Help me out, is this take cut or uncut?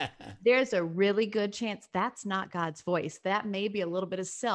uncut